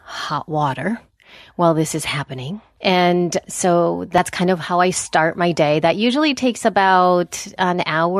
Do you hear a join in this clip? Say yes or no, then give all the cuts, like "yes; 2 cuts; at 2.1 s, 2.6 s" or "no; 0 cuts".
no; 0 cuts